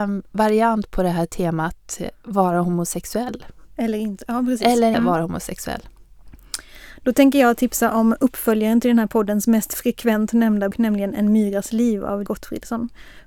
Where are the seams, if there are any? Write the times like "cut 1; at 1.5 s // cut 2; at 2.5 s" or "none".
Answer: cut 1; at 4.9 s // cut 2; at 10.7 s // cut 3; at 12.3 s